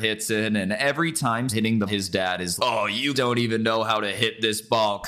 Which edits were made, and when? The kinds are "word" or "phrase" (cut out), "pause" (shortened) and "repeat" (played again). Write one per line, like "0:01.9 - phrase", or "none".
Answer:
0:01.5 - word
0:01.9 - word
0:02.6 - word
0:03.1 - word